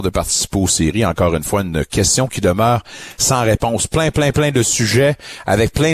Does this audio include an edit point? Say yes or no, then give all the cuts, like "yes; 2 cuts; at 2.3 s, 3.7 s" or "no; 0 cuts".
no; 0 cuts